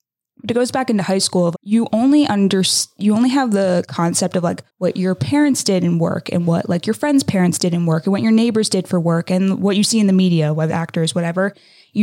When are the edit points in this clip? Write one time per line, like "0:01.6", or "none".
0:01.5
0:04.7
0:10.7